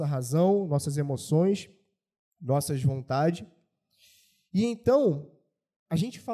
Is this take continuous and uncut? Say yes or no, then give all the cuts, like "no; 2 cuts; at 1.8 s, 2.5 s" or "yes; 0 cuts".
yes; 0 cuts